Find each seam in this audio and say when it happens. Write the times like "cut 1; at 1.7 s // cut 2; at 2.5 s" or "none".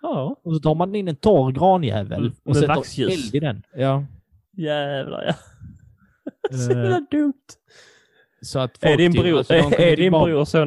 cut 1; at 3.7 s